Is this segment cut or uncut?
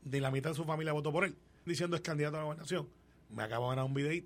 cut